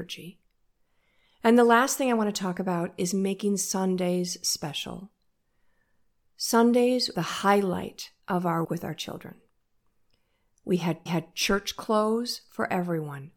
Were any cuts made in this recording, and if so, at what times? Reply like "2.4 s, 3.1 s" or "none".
7.1 s, 8.2 s, 8.6 s, 11.1 s